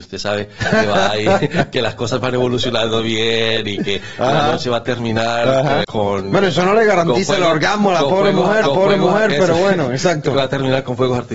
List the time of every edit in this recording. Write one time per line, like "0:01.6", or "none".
0:05.8
0:08.6